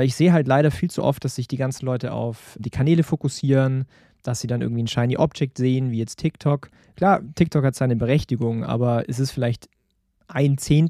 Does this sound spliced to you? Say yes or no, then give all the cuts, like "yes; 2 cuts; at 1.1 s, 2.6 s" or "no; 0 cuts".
yes; 1 cut; at 2.6 s